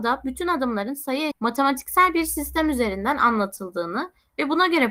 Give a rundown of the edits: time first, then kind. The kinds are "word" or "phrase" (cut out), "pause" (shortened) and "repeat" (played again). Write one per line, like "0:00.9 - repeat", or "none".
0:01.3 - word